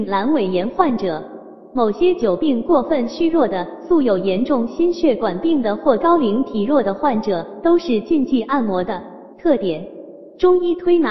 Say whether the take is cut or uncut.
cut